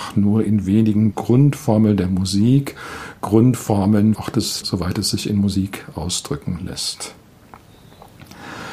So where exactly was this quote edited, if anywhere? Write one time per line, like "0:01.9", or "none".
0:01.1
0:04.1
0:04.6